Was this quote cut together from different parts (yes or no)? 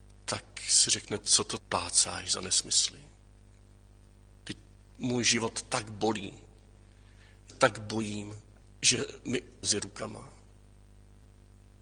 yes